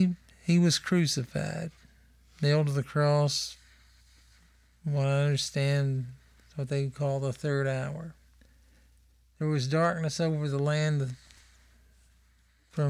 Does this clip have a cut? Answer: no; 0 cuts

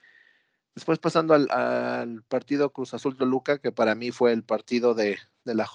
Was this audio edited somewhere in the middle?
no; 0 cuts

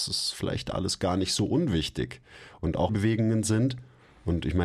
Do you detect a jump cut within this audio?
yes; 1 cut; at 2.9 s

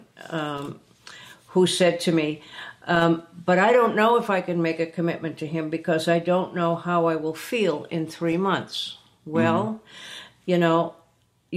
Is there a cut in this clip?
no; 0 cuts

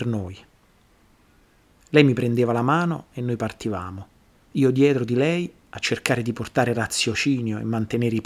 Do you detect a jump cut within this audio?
no; 0 cuts

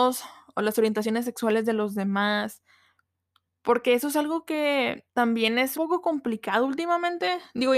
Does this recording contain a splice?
yes; 2 cuts; at 5.1 s, 5.7 s

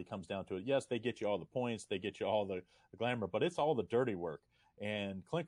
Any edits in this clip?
no; 0 cuts

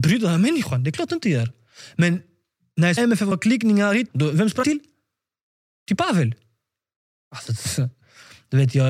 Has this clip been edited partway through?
yes; 4 cuts; at 3.0 s, 3.3 s, 4.1 s, 4.6 s

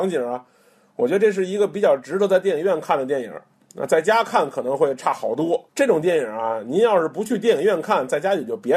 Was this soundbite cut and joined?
yes; 1 cut; at 5.7 s

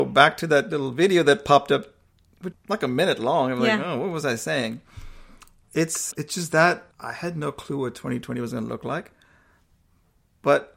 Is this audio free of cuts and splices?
no; 3 cuts; at 2.5 s, 6.1 s, 6.9 s

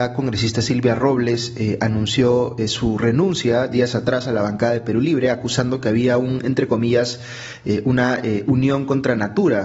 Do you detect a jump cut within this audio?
no; 0 cuts

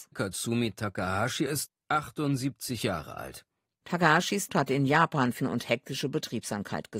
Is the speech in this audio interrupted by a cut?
yes; 2 cuts; at 4.5 s, 5.4 s

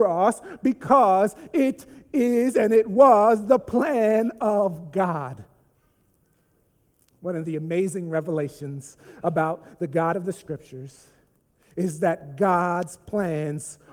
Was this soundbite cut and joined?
no; 0 cuts

